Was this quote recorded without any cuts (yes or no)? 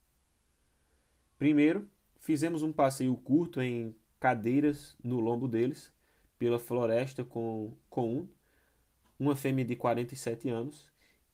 yes